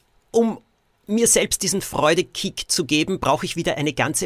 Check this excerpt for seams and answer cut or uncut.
uncut